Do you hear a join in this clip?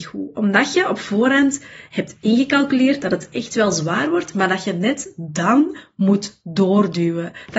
no; 0 cuts

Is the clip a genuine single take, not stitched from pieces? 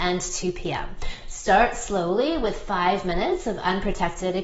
yes; 0 cuts

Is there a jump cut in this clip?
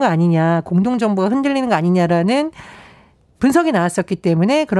no; 0 cuts

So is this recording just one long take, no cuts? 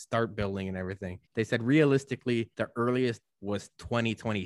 no; 3 cuts; at 1.3 s, 2.5 s, 3.2 s

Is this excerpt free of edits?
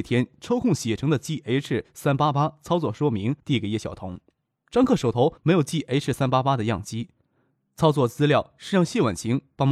no; 2 cuts; at 3.4 s, 5.4 s

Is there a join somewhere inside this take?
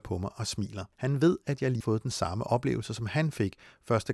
yes; 2 cuts; at 0.9 s, 1.8 s

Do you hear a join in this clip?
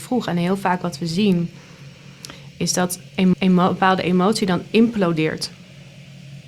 yes; 1 cut; at 3.3 s

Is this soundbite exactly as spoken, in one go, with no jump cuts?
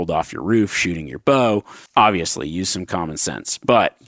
no; 1 cut; at 1.9 s

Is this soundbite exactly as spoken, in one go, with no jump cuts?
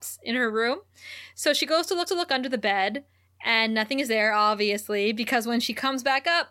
no; 1 cut; at 2.1 s

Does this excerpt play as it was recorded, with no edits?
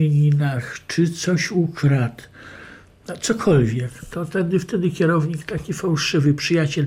yes; 0 cuts

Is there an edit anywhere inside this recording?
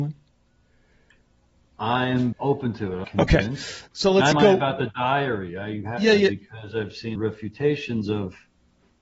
yes; 5 cuts; at 2.3 s, 3.0 s, 3.9 s, 4.3 s, 7.2 s

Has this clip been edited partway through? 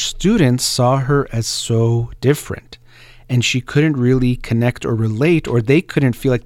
no; 0 cuts

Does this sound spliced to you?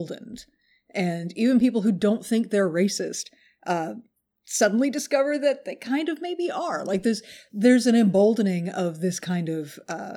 no; 0 cuts

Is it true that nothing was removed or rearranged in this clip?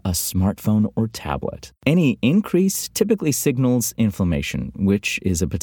no; 1 cut; at 1.8 s

